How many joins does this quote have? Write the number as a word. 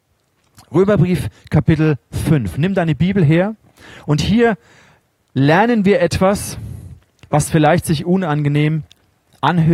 zero